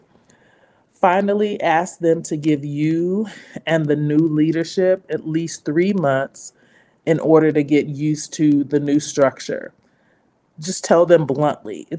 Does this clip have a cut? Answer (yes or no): no